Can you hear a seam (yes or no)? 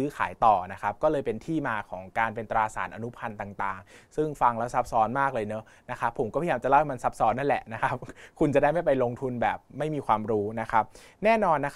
no